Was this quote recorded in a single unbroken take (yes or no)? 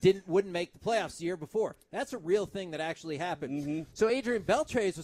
yes